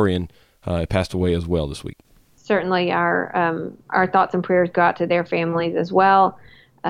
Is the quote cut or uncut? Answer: uncut